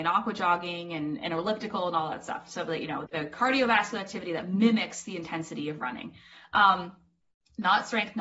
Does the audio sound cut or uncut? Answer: cut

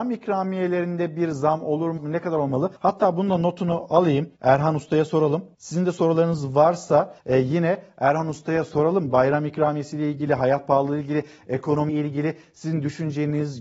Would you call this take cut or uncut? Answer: cut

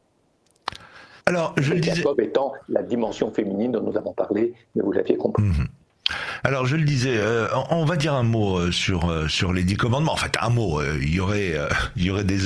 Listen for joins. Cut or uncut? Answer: cut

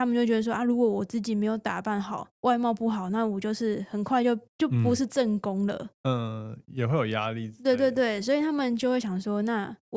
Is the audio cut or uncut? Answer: cut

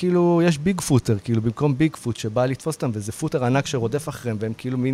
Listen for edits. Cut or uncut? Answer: uncut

